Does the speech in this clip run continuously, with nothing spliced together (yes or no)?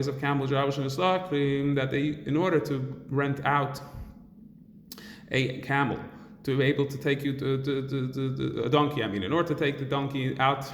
yes